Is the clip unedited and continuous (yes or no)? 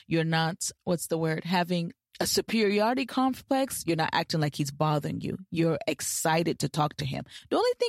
yes